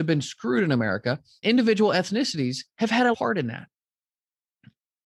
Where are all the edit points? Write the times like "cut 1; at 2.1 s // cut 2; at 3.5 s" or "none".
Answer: cut 1; at 1.4 s // cut 2; at 3.1 s

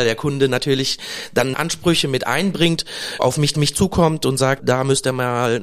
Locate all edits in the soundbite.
cut 1; at 1.5 s // cut 2; at 3.2 s // cut 3; at 3.5 s // cut 4; at 4.6 s

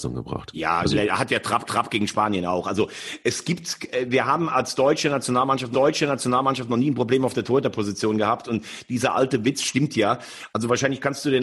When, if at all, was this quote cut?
cut 1; at 1.6 s // cut 2; at 5.7 s

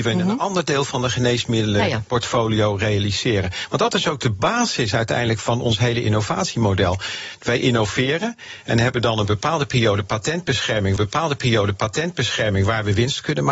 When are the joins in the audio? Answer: cut 1; at 11.0 s

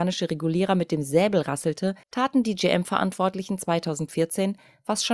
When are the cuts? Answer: cut 1; at 2.0 s

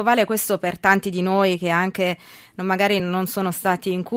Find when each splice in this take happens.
none

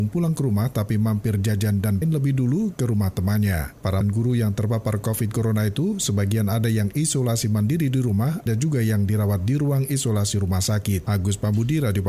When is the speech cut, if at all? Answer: cut 1; at 2.0 s // cut 2; at 4.0 s // cut 3; at 8.5 s

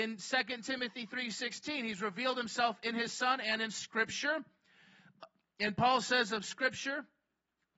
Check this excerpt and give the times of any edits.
none

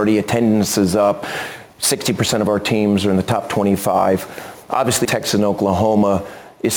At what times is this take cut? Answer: cut 1; at 5.0 s

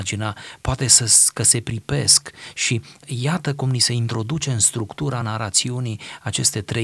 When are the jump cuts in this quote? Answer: none

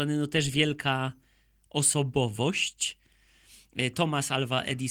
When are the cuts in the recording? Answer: none

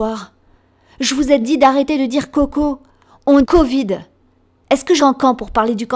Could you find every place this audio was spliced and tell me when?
cut 1; at 1.4 s // cut 2; at 3.4 s // cut 3; at 5.0 s

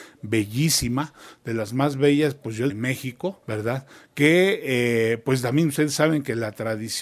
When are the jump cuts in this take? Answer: cut 1; at 2.7 s // cut 2; at 3.4 s

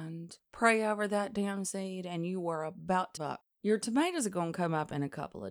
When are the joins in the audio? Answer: cut 1; at 3.2 s // cut 2; at 3.5 s

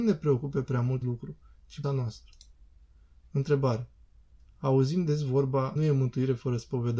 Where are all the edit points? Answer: cut 1; at 1.0 s // cut 2; at 1.8 s // cut 3; at 5.8 s

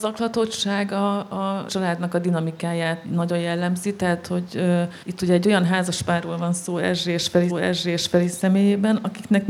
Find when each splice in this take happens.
cut 1; at 1.7 s // cut 2; at 3.0 s // cut 3; at 5.0 s // cut 4; at 7.5 s

